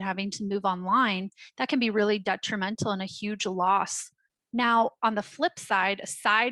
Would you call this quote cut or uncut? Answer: uncut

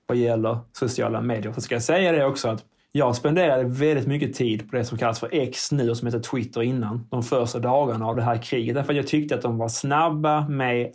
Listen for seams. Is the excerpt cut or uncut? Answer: uncut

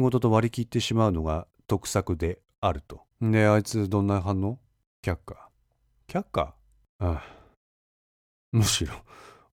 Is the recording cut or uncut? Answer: cut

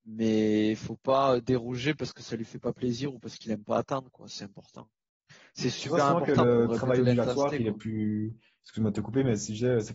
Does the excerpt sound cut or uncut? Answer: uncut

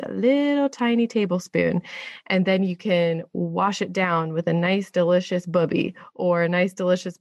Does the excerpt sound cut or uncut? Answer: uncut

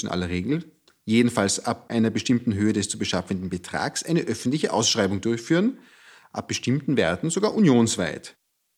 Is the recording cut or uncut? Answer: uncut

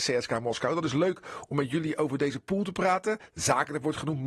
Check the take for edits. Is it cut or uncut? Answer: uncut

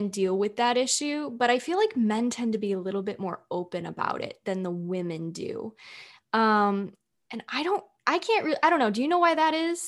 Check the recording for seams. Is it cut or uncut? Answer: uncut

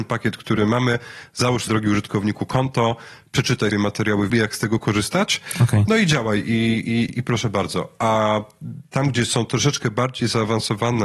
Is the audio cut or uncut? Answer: cut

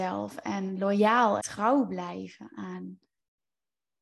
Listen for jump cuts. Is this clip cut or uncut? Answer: cut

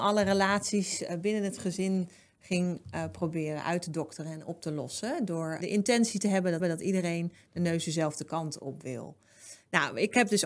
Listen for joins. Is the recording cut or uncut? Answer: cut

